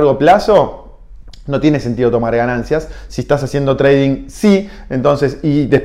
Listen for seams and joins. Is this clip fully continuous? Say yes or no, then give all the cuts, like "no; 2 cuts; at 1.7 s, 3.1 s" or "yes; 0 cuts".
yes; 0 cuts